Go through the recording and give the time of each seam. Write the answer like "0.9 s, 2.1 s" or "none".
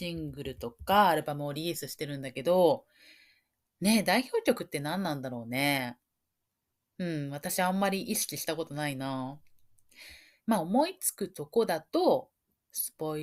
none